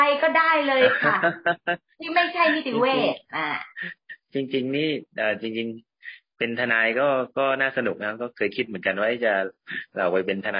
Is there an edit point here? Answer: yes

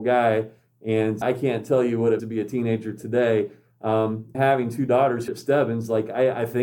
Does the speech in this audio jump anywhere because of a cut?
yes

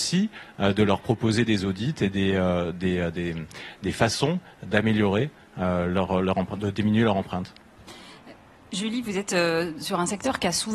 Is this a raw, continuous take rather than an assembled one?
yes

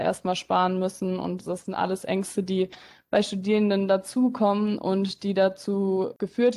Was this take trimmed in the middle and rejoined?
no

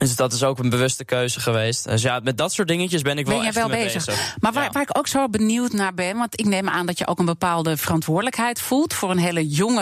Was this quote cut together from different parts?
no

